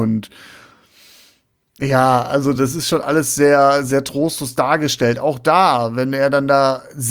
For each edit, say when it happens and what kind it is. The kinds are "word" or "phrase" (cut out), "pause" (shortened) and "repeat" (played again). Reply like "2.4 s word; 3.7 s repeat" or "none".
none